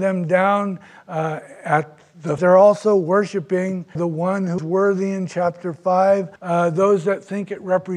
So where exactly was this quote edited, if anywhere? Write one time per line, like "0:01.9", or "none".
0:02.4
0:04.0
0:04.6
0:06.4

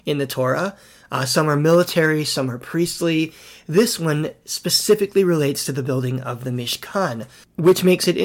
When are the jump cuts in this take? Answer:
none

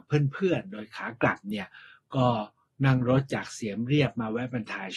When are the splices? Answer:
none

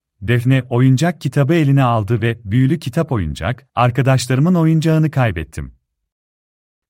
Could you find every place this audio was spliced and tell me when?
none

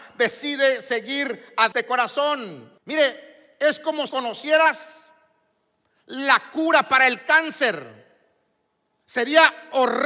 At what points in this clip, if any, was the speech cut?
0:01.7
0:02.8
0:04.1

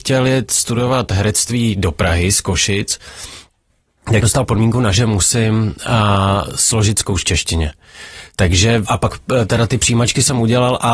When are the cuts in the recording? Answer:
0:04.2
0:04.9
0:07.2
0:08.8
0:09.7

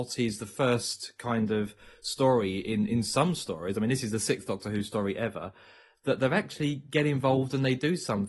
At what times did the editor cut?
none

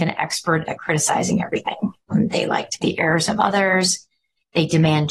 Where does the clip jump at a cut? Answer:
0:02.1
0:02.8

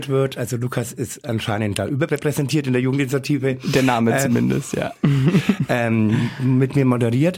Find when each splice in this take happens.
none

